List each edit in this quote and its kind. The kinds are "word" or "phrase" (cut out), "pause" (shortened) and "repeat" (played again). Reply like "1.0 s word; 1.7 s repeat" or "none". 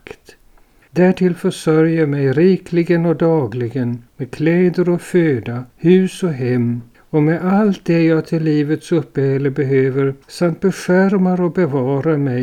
4.1 s pause; 5.7 s pause; 6.9 s pause; 10.2 s pause